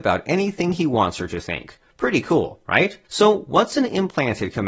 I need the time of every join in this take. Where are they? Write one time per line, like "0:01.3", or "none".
0:03.0